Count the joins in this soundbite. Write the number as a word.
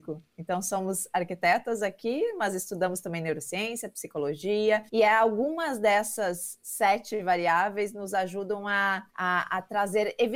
two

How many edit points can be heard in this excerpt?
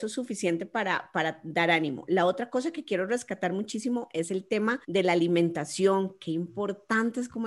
one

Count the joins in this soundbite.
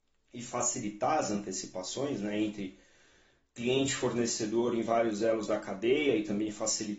zero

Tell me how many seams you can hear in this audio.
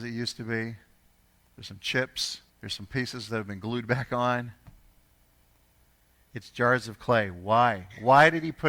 one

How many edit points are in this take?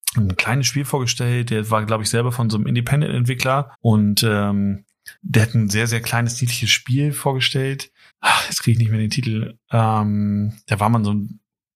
three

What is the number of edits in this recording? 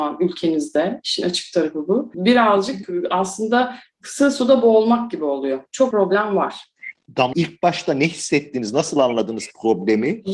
two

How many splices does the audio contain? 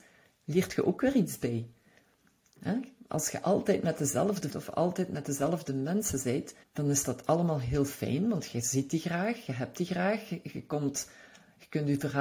two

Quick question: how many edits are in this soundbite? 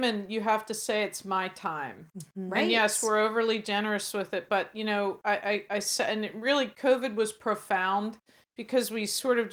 one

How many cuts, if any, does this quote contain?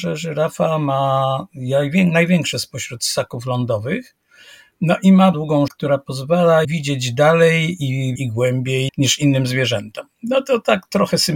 six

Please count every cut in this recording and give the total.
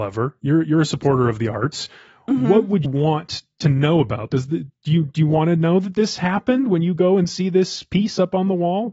two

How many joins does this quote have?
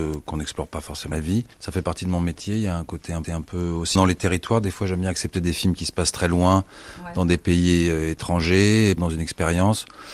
five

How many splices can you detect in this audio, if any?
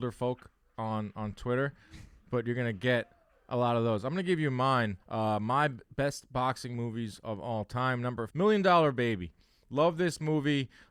two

